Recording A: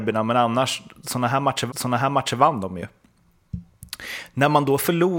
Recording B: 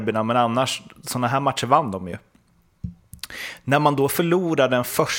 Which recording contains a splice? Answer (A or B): A